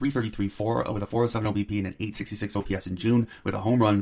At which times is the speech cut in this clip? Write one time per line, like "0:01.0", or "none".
none